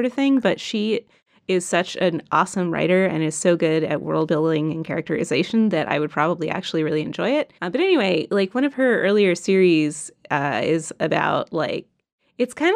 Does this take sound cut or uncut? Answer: cut